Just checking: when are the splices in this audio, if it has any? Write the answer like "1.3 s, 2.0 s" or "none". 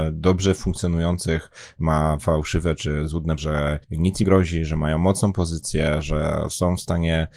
3.4 s, 3.8 s, 4.2 s